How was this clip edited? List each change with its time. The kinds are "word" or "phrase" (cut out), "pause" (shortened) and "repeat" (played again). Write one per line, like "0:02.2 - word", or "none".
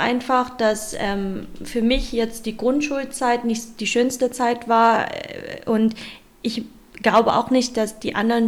none